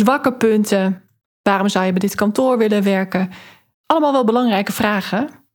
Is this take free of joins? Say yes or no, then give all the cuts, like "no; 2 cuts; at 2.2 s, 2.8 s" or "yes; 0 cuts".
yes; 0 cuts